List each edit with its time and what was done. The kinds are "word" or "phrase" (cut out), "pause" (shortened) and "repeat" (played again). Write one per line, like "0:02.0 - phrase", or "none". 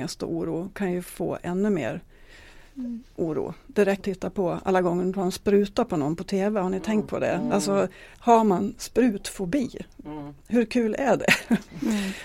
0:03.1 - pause
0:04.0 - phrase
0:08.1 - pause